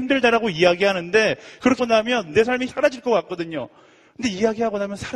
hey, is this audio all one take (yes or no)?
no